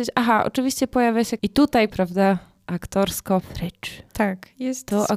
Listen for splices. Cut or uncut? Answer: cut